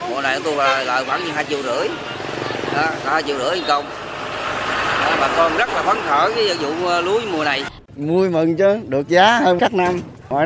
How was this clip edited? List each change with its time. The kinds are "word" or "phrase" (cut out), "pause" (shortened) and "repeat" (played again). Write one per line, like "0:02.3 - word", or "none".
none